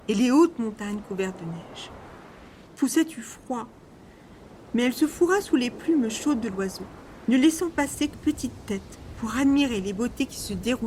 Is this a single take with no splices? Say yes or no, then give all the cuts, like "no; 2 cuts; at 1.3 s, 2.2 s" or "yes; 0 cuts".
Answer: no; 2 cuts; at 2.7 s, 8.1 s